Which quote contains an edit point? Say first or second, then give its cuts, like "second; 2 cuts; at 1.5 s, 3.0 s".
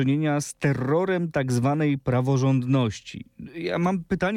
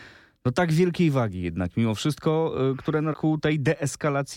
second; 1 cut; at 3.1 s